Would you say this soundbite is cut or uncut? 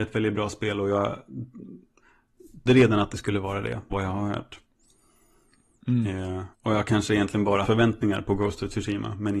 cut